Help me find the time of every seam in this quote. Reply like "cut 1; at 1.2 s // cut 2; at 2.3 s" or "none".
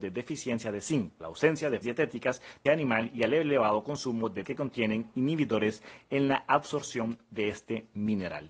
cut 1; at 1.2 s // cut 2; at 1.8 s // cut 3; at 2.7 s // cut 4; at 4.4 s